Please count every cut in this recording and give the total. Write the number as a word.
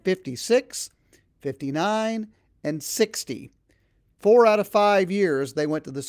one